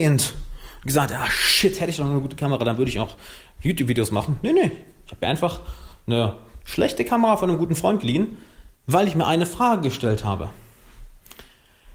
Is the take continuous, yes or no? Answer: yes